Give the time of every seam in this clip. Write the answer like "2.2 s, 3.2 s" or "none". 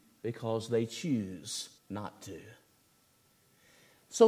1.8 s